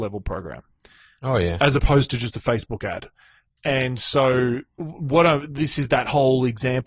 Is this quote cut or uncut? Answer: uncut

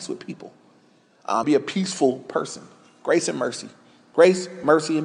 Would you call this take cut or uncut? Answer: cut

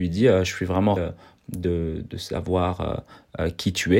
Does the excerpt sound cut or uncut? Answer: cut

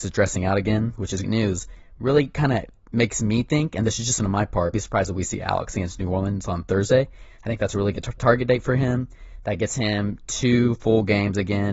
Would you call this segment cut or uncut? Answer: cut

